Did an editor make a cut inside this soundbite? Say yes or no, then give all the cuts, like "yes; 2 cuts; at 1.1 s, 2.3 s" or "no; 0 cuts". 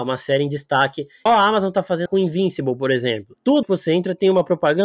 yes; 3 cuts; at 1.3 s, 2.1 s, 3.6 s